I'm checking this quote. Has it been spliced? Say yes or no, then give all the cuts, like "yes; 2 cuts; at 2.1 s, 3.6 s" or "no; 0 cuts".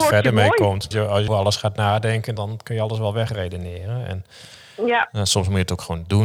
yes; 3 cuts; at 0.9 s, 1.3 s, 2.4 s